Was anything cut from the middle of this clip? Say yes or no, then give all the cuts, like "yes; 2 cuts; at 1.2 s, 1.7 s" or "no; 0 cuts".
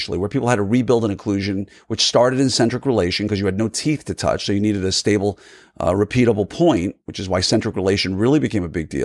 no; 0 cuts